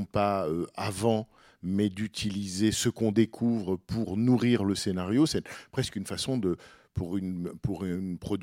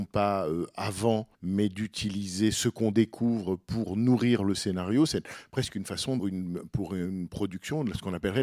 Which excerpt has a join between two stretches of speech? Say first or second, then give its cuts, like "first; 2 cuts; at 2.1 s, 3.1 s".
second; 2 cuts; at 1.3 s, 6.2 s